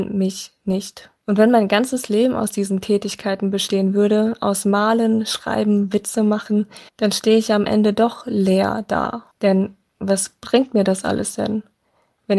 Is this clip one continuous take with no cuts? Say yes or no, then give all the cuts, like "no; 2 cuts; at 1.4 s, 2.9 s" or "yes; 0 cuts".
no; 3 cuts; at 1.2 s, 6.9 s, 9.3 s